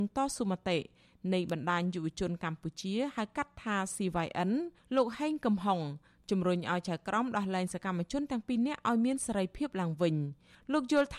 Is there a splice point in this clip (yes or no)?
no